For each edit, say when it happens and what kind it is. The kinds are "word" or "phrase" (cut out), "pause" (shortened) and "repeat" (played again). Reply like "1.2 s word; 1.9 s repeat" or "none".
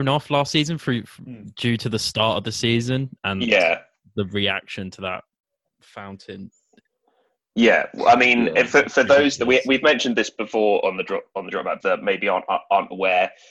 11.8 s phrase